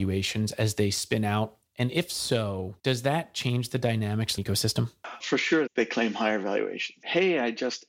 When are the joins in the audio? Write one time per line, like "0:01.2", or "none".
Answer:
0:02.8
0:04.4
0:05.2